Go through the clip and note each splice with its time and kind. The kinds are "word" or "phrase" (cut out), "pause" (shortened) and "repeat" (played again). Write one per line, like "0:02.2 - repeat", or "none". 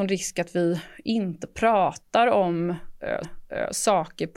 0:03.2 - repeat